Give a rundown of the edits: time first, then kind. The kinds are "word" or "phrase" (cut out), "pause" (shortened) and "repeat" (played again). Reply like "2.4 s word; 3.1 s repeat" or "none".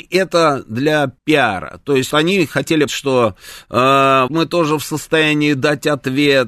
1.2 s pause; 2.1 s word; 2.9 s word; 4.3 s word